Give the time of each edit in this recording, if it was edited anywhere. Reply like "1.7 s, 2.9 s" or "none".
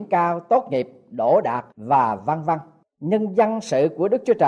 none